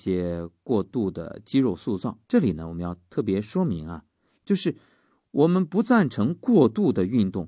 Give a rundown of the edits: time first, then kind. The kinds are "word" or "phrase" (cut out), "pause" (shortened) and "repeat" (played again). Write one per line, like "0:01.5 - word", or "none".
0:02.2 - pause